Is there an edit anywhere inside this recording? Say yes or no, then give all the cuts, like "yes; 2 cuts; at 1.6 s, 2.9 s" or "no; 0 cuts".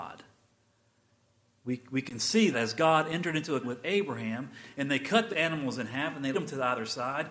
yes; 4 cuts; at 2.5 s, 3.6 s, 5.3 s, 6.3 s